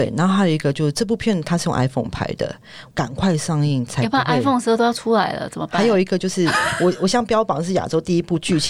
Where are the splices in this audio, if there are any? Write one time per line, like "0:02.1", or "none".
none